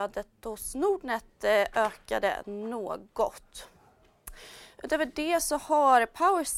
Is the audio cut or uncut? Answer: uncut